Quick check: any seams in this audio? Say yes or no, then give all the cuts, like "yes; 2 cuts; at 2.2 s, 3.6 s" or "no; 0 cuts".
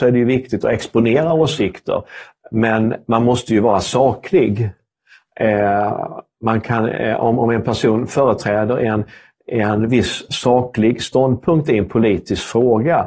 no; 0 cuts